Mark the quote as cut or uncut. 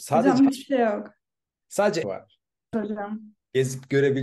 cut